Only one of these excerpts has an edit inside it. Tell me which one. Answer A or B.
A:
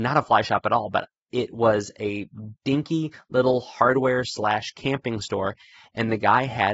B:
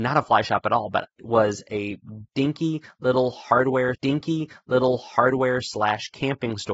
B